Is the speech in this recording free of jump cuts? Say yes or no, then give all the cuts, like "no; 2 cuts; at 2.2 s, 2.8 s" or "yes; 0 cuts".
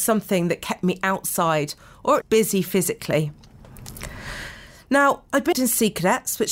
no; 2 cuts; at 2.2 s, 5.5 s